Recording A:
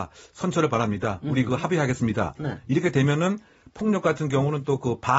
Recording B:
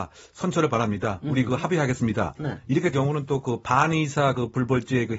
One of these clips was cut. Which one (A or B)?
B